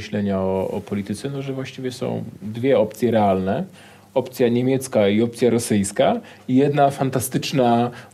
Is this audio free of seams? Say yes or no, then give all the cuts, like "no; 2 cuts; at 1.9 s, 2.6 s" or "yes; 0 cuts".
yes; 0 cuts